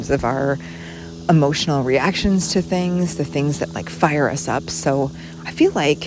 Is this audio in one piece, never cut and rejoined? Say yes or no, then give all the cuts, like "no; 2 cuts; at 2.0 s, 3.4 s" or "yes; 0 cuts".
yes; 0 cuts